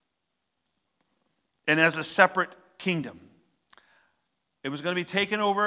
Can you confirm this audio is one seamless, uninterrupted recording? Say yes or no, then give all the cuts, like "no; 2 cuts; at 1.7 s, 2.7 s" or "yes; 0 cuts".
yes; 0 cuts